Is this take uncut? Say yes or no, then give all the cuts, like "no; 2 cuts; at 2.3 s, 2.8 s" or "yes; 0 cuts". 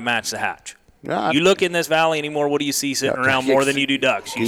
yes; 0 cuts